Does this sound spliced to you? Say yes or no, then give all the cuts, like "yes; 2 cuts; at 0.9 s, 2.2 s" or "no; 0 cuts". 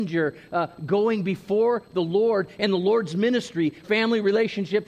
yes; 1 cut; at 3.8 s